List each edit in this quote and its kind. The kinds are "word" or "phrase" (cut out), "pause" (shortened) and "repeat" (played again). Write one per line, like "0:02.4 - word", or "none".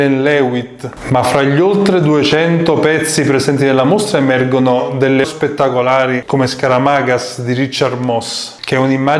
0:05.2 - phrase

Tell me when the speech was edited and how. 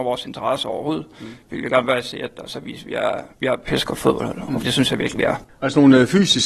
0:03.3 - pause
0:04.6 - word

